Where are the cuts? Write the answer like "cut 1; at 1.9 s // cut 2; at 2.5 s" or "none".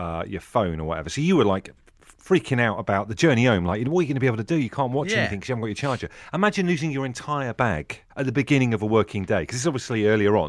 cut 1; at 8.1 s